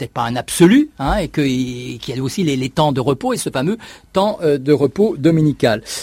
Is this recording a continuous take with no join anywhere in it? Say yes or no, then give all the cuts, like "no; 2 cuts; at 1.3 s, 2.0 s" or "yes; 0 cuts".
yes; 0 cuts